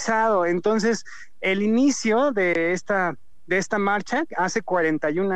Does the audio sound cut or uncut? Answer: uncut